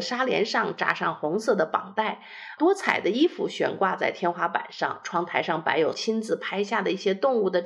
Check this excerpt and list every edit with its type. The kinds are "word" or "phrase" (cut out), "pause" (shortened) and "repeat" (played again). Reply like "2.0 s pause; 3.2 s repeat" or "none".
2.6 s word; 5.0 s word; 5.9 s word